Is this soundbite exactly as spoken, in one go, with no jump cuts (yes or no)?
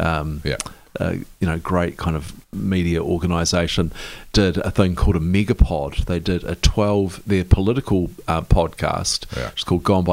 no